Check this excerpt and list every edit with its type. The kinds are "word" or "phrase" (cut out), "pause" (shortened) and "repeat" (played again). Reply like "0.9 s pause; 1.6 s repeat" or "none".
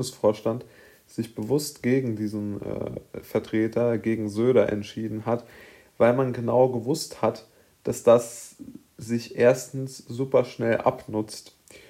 none